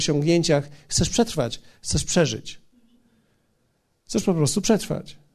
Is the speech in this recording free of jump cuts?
yes; 0 cuts

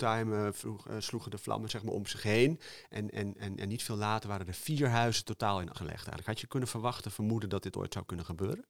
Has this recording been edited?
yes; 1 cut; at 5.7 s

